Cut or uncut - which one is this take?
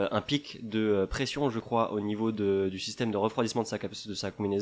uncut